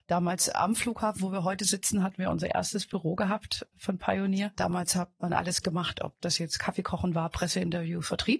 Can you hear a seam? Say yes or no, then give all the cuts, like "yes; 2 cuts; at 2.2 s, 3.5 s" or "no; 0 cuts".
no; 0 cuts